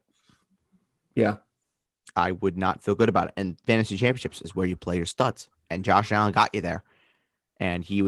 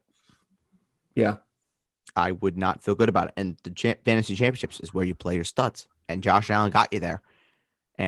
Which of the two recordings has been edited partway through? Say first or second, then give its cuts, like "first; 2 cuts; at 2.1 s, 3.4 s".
first; 1 cut; at 3.6 s